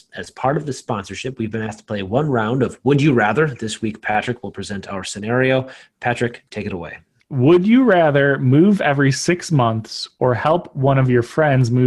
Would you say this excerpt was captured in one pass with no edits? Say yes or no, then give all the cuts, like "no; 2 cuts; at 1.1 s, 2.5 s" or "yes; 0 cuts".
yes; 0 cuts